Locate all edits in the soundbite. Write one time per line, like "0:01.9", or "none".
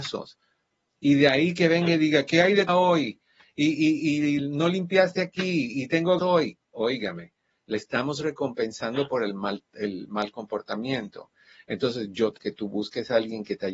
0:02.7
0:04.4
0:06.2
0:12.4

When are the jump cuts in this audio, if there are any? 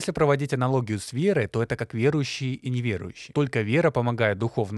none

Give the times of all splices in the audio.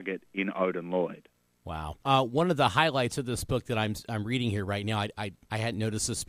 0:02.0

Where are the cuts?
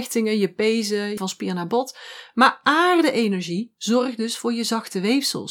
0:01.2

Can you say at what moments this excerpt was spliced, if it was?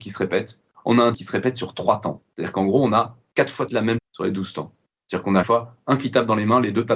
0:01.1
0:03.7
0:04.0
0:05.4

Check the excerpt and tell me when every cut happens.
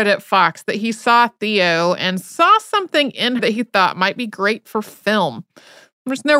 0:03.4

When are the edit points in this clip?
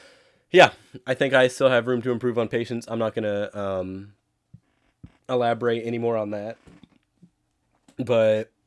0:05.2

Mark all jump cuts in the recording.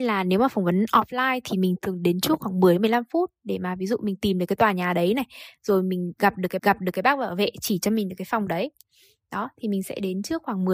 0:06.6

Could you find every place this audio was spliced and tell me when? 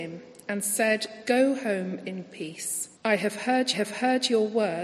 0:03.0
0:03.7

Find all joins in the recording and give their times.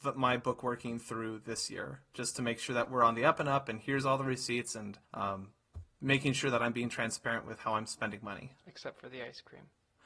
0:05.0

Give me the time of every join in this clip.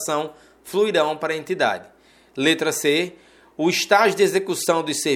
none

